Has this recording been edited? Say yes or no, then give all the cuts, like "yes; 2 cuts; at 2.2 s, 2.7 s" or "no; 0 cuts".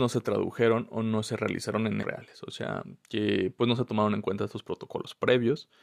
yes; 1 cut; at 2.0 s